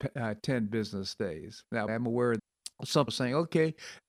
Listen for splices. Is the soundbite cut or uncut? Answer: cut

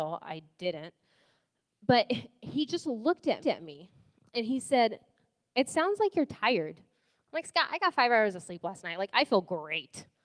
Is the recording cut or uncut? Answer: cut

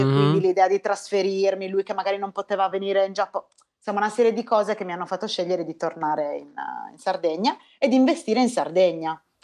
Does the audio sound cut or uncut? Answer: uncut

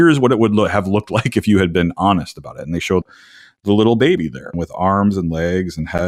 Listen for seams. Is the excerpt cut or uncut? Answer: uncut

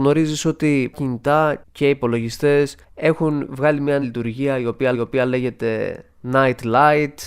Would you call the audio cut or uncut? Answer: cut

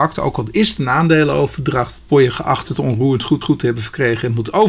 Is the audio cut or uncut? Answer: cut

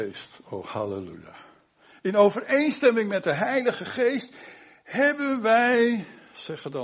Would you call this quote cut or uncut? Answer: uncut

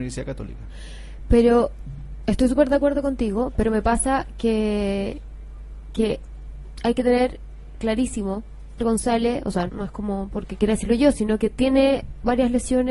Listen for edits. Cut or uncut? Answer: cut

